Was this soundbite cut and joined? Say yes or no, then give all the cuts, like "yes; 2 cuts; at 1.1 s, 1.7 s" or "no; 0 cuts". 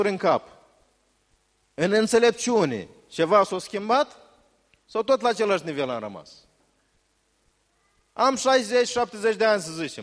no; 0 cuts